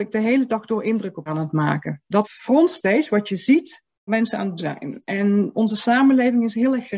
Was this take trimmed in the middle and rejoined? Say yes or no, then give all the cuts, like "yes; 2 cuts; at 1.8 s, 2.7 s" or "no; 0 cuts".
yes; 5 cuts; at 1.3 s, 2.2 s, 4.1 s, 4.6 s, 5.5 s